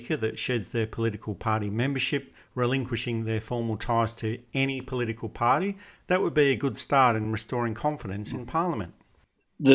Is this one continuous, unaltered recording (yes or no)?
yes